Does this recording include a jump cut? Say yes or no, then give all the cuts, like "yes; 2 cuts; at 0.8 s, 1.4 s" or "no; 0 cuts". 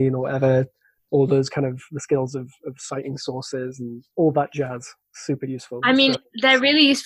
yes; 1 cut; at 4.1 s